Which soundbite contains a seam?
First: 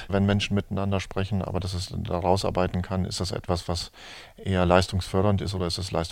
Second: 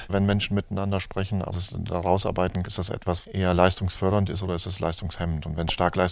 second; 3 cuts; at 1.5 s, 2.6 s, 3.2 s

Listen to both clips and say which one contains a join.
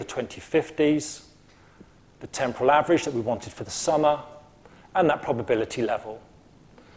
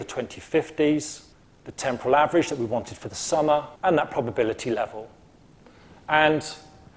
second; 2 cuts; at 1.3 s, 3.8 s

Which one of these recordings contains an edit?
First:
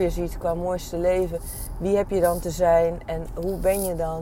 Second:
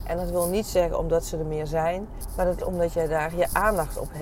second; 1 cut; at 2.6 s

